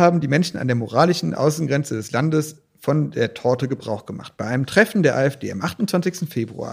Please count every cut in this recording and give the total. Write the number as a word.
zero